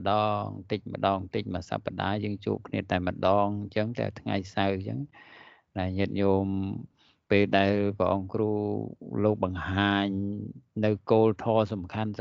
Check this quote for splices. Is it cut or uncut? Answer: uncut